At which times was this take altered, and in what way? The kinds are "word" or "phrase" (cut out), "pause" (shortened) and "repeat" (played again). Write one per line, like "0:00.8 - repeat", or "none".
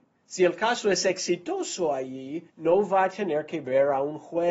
0:02.5 - pause

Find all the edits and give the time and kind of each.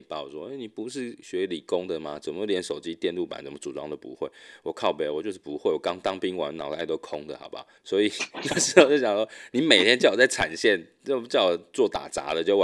0:07.8 - pause

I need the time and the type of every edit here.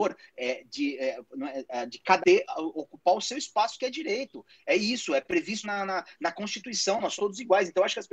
0:02.2 - word
0:05.6 - word
0:07.2 - word

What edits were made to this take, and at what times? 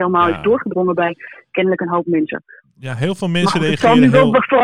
none

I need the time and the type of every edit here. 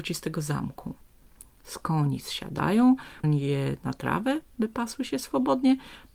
0:03.2 - word
0:04.5 - pause

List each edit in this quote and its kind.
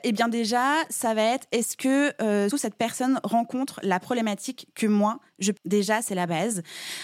0:02.5 - word
0:05.6 - word
0:06.1 - word

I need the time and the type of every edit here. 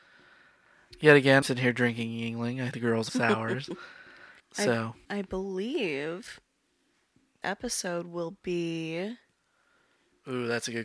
0:01.4 - word
0:02.7 - word
0:03.1 - phrase
0:04.4 - pause
0:05.0 - pause
0:07.4 - word

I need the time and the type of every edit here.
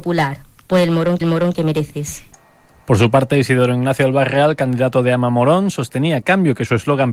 0:01.2 - repeat
0:06.2 - word

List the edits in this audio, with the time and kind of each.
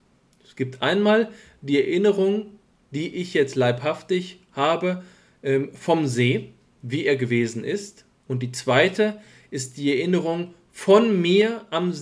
none

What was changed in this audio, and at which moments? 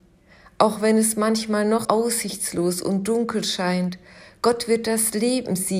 0:01.8 - word

